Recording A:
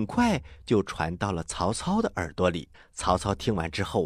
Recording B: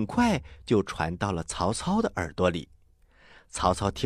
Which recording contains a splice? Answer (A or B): A